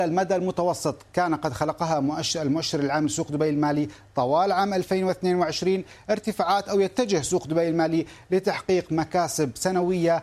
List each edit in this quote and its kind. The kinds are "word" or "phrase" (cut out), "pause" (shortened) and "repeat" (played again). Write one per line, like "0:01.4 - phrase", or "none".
none